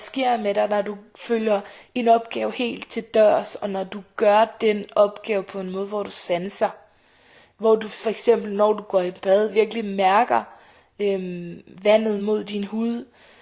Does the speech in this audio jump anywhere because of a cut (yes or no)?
no